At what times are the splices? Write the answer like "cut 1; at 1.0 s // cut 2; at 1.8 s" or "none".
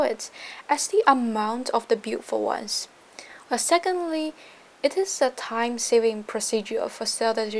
none